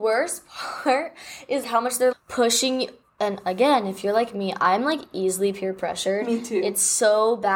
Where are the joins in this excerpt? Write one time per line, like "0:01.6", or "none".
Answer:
0:01.6
0:02.1